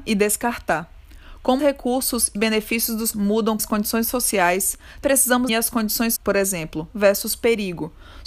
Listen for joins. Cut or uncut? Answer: cut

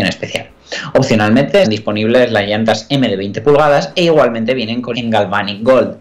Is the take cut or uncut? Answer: cut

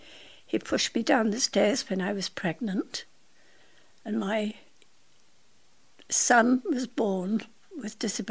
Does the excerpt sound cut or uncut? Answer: uncut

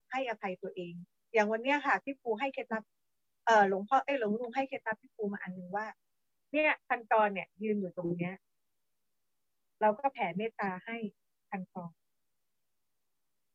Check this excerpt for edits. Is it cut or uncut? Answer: cut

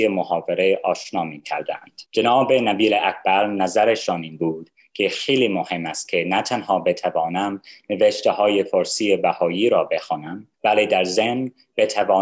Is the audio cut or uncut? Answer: cut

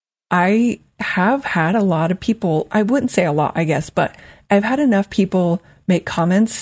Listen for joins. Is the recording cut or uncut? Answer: uncut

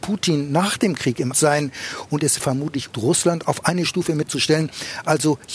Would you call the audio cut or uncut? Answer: cut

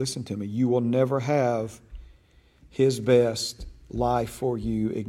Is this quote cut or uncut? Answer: uncut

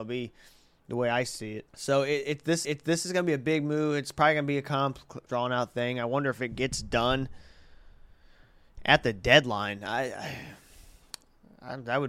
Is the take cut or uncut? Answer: cut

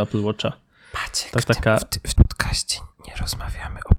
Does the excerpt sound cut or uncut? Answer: cut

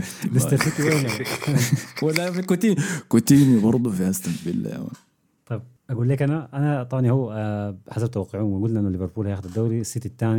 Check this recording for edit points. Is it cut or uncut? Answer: uncut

